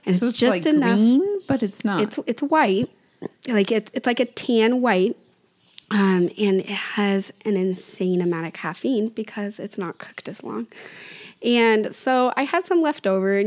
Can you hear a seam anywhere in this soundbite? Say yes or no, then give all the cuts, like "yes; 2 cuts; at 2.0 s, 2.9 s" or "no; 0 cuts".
no; 0 cuts